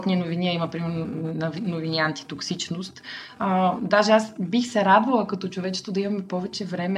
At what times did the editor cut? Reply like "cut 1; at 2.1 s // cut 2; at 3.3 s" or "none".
none

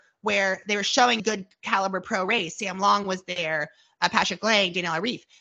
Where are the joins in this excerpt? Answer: cut 1; at 1.2 s

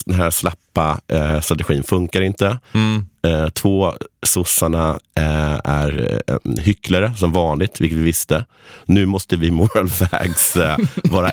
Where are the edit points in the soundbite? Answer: none

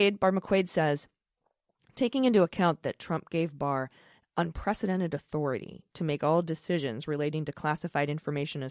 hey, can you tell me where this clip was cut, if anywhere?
none

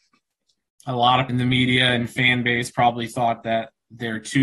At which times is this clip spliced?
cut 1; at 1.3 s

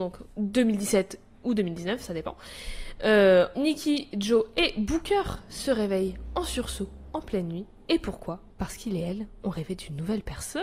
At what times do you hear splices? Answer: cut 1; at 3.5 s // cut 2; at 8.5 s

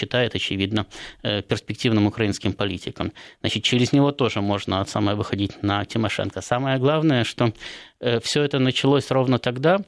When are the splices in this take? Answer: none

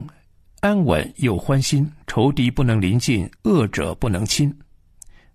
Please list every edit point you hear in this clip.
cut 1; at 2.0 s // cut 2; at 3.3 s

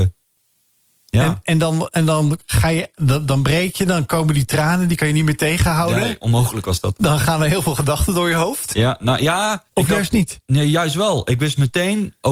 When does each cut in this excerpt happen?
cut 1; at 9.7 s

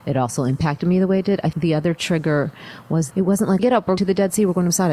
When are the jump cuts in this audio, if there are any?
cut 1; at 1.5 s // cut 2; at 3.1 s // cut 3; at 3.6 s // cut 4; at 4.0 s

